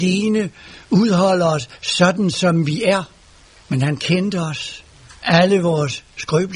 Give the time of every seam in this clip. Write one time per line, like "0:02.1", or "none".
0:03.5
0:05.2